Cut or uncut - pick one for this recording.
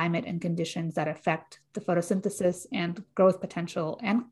uncut